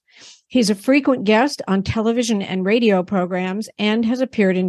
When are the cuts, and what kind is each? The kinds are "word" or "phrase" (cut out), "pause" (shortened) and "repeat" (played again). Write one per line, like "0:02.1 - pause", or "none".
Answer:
none